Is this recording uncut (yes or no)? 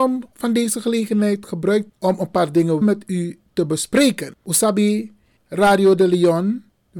no